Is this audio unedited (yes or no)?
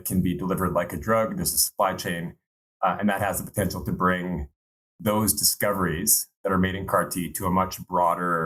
yes